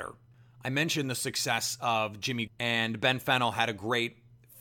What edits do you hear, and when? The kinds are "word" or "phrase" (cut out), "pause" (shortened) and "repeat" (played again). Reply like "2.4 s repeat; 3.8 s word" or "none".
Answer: 2.5 s word